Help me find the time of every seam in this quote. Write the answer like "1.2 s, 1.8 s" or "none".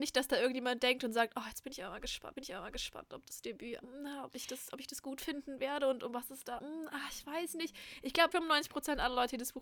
2.4 s, 3.8 s, 6.6 s, 8.3 s